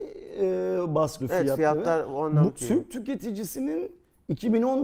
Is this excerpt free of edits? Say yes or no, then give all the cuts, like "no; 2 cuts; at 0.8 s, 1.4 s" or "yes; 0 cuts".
no; 2 cuts; at 1.2 s, 2.5 s